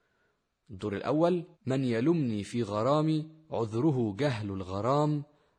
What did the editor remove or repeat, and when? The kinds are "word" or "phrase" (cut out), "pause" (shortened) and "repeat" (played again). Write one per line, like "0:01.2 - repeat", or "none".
0:01.5 - pause